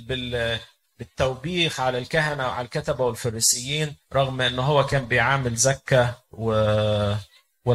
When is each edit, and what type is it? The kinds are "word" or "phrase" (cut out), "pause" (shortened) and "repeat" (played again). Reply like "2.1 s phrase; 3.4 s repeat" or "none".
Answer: 4.0 s pause